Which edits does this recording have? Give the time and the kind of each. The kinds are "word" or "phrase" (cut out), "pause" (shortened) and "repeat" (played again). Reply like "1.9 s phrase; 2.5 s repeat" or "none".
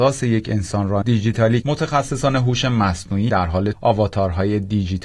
1.0 s word; 1.6 s word; 3.3 s word; 3.7 s word

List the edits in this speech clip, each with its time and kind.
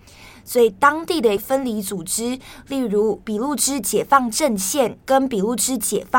5.0 s pause

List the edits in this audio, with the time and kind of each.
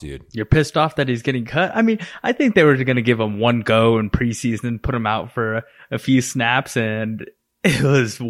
none

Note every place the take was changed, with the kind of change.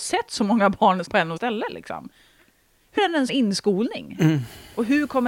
1.0 s word; 1.4 s word; 3.0 s word; 3.3 s word

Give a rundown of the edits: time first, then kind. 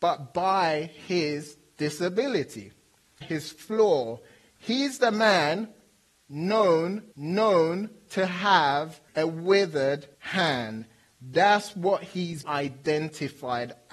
3.2 s word; 7.1 s repeat; 9.1 s pause; 10.1 s pause; 12.4 s word

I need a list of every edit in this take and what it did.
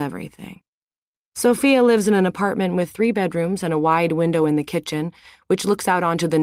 1.0 s pause

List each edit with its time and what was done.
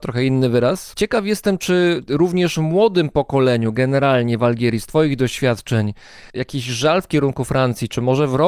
0.9 s phrase; 6.3 s pause

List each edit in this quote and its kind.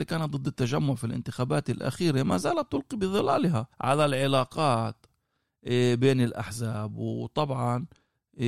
3.7 s pause

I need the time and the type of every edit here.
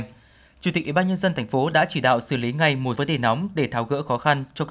2.9 s word

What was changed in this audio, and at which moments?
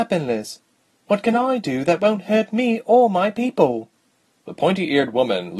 none

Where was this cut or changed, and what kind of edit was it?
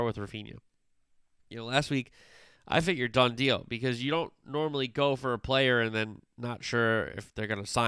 none

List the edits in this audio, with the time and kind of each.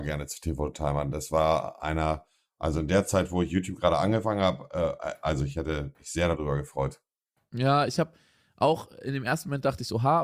none

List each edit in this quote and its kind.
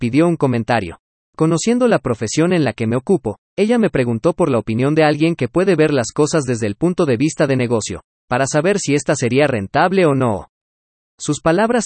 none

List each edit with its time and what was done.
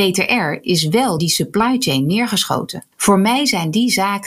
1.2 s word; 2.9 s pause

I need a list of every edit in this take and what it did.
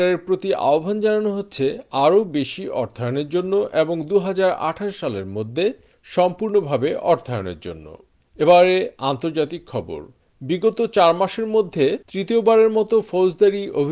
12.0 s pause

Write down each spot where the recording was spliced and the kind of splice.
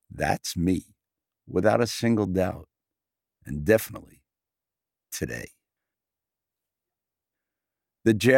none

